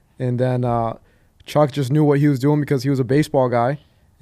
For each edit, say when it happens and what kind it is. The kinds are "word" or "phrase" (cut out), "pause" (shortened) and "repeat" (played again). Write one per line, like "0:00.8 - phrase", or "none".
none